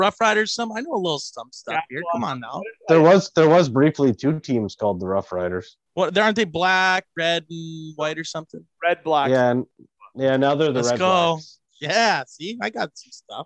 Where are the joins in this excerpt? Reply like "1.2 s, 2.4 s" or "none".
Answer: 5.9 s, 7.1 s, 11.7 s